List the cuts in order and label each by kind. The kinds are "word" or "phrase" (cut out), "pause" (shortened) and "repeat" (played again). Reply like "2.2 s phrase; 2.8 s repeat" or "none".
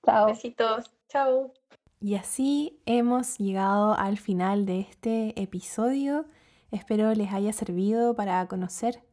none